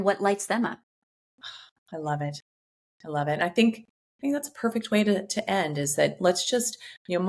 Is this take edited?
no; 0 cuts

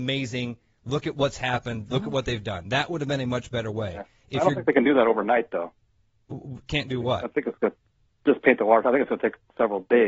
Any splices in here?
no; 0 cuts

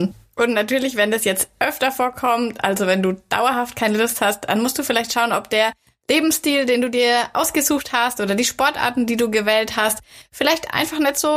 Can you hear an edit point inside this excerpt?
no; 0 cuts

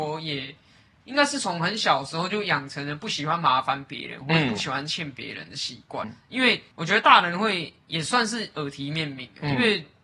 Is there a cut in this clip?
yes; 2 cuts; at 6.0 s, 6.7 s

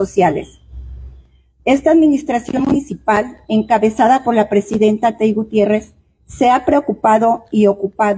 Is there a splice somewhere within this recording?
no; 0 cuts

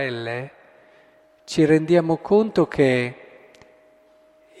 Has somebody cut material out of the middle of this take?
no; 0 cuts

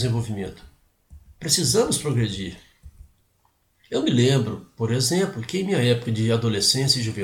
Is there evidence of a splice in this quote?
no; 0 cuts

